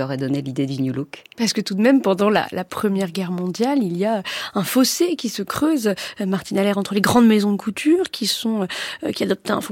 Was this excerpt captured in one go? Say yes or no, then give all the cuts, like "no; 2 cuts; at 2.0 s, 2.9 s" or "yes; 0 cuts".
yes; 0 cuts